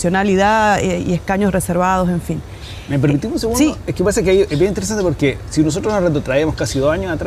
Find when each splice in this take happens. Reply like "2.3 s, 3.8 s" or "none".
none